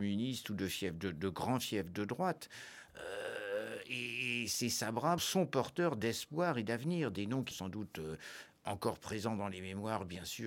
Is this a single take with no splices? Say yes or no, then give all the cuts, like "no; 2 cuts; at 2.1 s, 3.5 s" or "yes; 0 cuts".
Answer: no; 2 cuts; at 5.2 s, 7.5 s